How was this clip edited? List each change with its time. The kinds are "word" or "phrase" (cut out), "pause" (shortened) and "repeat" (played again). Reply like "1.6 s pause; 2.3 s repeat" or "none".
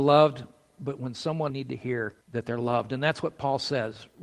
1.5 s phrase; 2.2 s pause

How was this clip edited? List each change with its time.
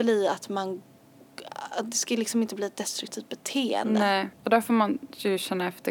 4.3 s pause

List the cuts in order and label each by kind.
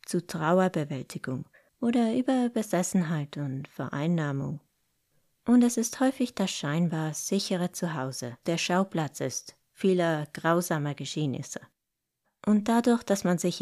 8.4 s word

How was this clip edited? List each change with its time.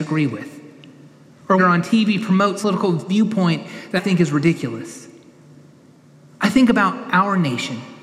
1.6 s phrase; 2.6 s word; 4.0 s word

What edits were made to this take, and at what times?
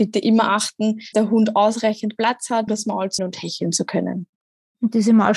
1.1 s word; 2.7 s word; 3.2 s word

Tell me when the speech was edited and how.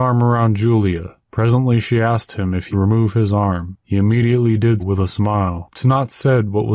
2.7 s word; 4.8 s word

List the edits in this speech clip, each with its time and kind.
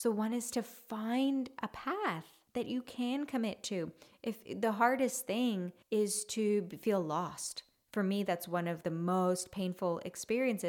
2.5 s pause; 5.8 s pause; 8.8 s word

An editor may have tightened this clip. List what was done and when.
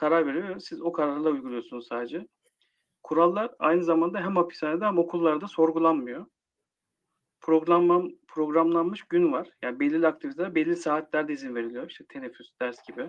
none

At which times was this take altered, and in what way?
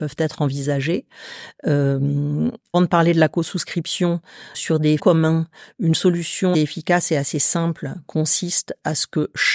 2.7 s word; 4.5 s word; 5.0 s word; 6.5 s word

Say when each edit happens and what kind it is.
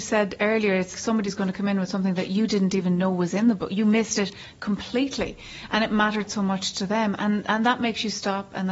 0.9 s word

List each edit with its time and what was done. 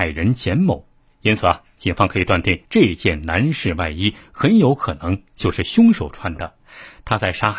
1.0 s pause; 2.6 s pause

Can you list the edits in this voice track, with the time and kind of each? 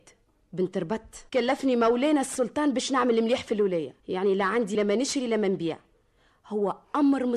1.3 s pause; 4.0 s pause

